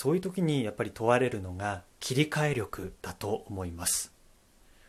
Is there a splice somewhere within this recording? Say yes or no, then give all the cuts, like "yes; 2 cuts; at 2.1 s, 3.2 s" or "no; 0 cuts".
yes; 2 cuts; at 1.9 s, 3.0 s